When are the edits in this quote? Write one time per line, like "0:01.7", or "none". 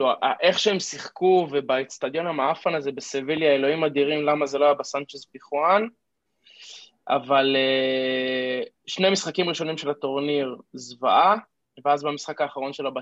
none